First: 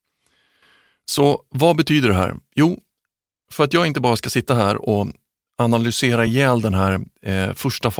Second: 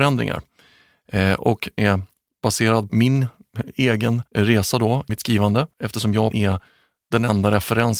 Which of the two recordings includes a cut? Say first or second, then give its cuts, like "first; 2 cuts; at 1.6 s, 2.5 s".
second; 6 cuts; at 1.8 s, 2.9 s, 4.3 s, 5.1 s, 5.7 s, 6.3 s